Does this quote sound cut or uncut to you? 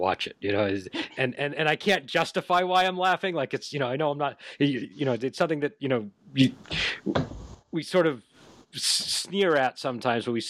uncut